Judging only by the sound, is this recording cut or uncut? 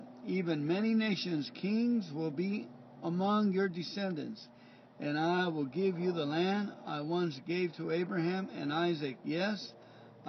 uncut